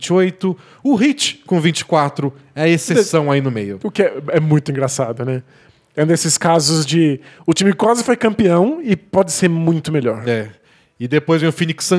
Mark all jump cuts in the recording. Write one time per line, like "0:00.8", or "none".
none